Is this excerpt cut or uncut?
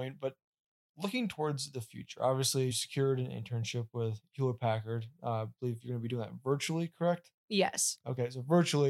cut